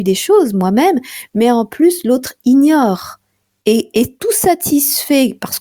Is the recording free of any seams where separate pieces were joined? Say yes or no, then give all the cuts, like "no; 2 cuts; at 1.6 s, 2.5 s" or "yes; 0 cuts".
yes; 0 cuts